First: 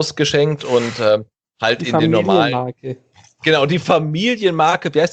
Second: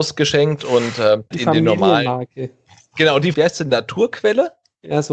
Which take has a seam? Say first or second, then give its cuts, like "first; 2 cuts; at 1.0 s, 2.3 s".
second; 2 cuts; at 1.3 s, 3.3 s